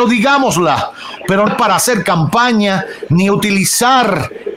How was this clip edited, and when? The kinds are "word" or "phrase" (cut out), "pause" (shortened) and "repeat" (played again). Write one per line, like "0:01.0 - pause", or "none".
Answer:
0:01.5 - word